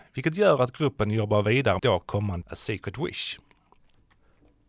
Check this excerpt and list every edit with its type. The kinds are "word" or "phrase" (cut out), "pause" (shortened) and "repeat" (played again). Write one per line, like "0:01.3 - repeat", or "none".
0:01.8 - phrase
0:02.4 - word